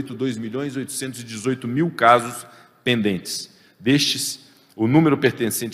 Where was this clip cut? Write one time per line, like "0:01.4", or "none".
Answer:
none